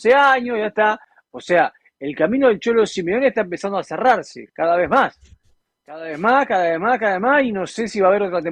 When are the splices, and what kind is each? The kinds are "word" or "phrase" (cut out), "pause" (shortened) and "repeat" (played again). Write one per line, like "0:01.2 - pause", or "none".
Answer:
none